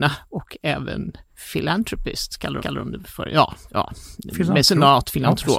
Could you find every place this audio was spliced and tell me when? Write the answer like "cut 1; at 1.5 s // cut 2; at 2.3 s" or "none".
cut 1; at 1.3 s // cut 2; at 2.6 s

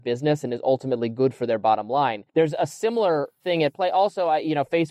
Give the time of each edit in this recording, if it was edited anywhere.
cut 1; at 2.3 s

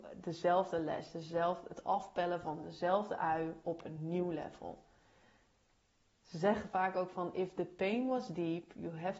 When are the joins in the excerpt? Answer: none

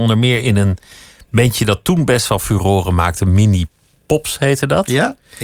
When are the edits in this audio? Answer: none

